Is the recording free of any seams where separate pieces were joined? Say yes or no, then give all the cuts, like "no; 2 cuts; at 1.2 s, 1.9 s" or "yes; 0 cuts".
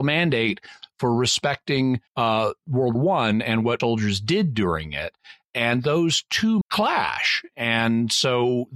no; 4 cuts; at 2.1 s, 2.9 s, 3.8 s, 6.6 s